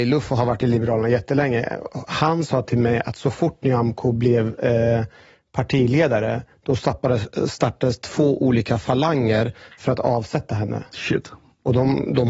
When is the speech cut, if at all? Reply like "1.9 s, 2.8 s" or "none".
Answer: none

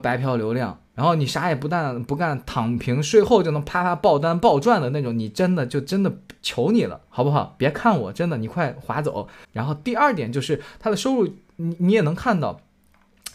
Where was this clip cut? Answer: none

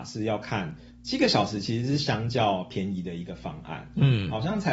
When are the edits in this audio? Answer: 0.9 s

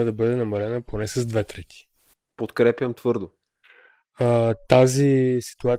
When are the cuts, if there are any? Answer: none

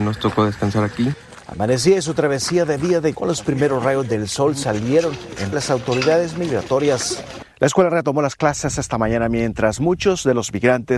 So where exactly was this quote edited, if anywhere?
3.1 s, 5.5 s, 7.5 s

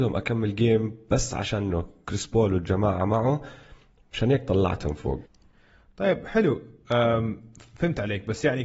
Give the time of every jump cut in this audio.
none

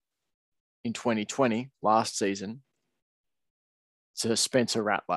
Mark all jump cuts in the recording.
none

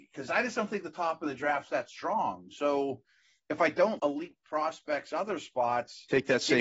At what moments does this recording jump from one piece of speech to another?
4.0 s

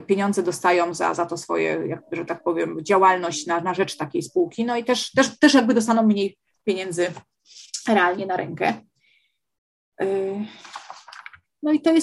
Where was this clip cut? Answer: none

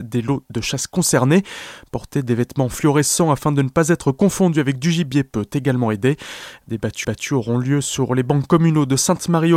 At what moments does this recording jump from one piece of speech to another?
7.0 s

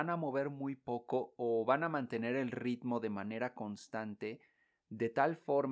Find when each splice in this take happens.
none

